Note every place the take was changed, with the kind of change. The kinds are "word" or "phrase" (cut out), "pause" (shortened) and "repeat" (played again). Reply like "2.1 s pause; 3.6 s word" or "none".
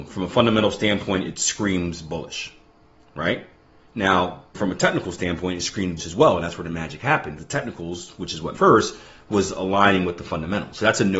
4.5 s word; 6.0 s word; 7.4 s word; 8.5 s word